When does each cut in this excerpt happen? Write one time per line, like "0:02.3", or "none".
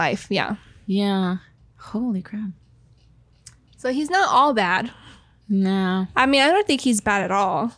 none